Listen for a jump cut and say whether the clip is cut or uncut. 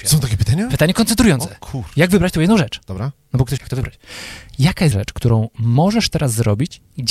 cut